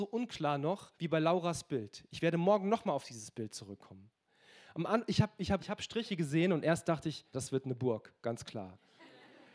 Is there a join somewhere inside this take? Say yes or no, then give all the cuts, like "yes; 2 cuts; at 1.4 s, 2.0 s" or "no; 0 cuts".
yes; 3 cuts; at 0.9 s, 5.6 s, 7.3 s